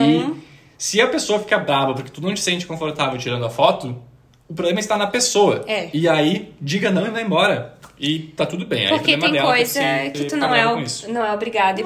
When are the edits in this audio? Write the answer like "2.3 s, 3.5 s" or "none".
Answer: none